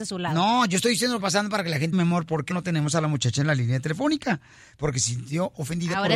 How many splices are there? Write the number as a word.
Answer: three